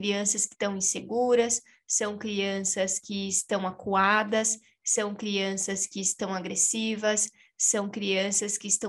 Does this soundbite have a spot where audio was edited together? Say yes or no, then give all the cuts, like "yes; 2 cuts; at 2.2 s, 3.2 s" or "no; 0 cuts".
no; 0 cuts